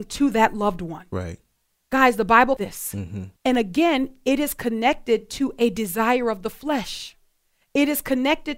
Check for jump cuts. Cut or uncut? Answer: cut